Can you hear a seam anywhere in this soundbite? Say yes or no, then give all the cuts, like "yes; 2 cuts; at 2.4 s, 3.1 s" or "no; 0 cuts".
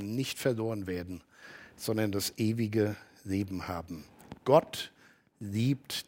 no; 0 cuts